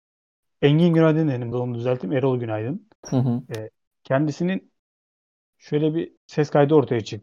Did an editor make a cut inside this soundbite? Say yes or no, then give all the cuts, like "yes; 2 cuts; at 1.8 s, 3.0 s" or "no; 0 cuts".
yes; 3 cuts; at 1.5 s, 3.0 s, 6.2 s